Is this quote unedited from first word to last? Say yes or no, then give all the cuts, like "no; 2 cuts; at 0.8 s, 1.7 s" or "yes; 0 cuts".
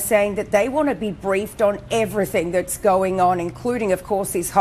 yes; 0 cuts